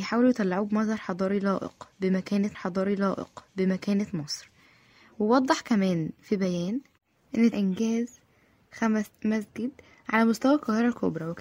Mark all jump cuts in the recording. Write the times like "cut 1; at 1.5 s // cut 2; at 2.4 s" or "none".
cut 1; at 2.5 s // cut 2; at 7.5 s // cut 3; at 9.1 s